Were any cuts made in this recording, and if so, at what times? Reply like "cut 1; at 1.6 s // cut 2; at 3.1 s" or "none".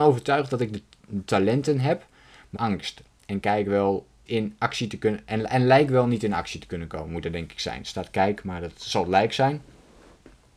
cut 1; at 2.6 s // cut 2; at 4.3 s

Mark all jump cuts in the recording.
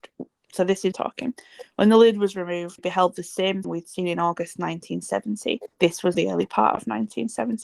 cut 1; at 0.9 s // cut 2; at 2.8 s // cut 3; at 3.6 s // cut 4; at 5.7 s // cut 5; at 6.1 s

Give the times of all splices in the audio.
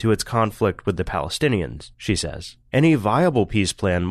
cut 1; at 2.6 s

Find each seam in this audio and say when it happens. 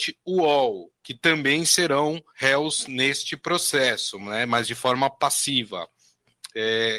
cut 1; at 1.0 s // cut 2; at 2.3 s

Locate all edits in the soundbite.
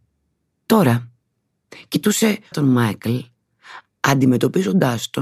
cut 1; at 2.5 s

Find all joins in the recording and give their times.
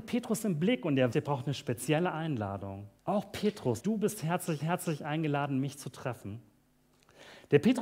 cut 1; at 1.1 s // cut 2; at 3.0 s // cut 3; at 3.8 s // cut 4; at 4.6 s

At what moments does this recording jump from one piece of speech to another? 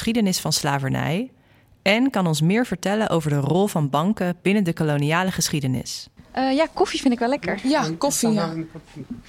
none

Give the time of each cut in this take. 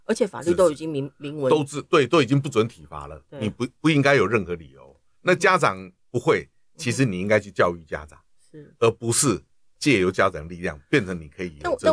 none

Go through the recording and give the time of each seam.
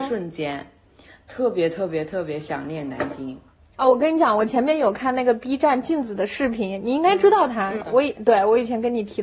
cut 1; at 7.8 s

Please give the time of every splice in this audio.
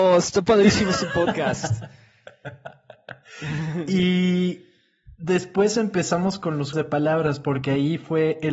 cut 1; at 6.7 s

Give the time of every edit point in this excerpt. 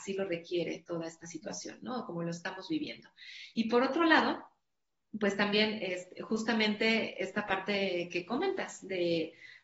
none

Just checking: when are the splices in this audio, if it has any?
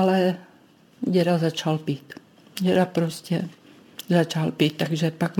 cut 1; at 2.4 s

